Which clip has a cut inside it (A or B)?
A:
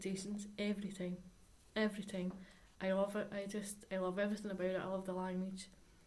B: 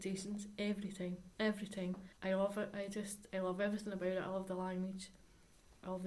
B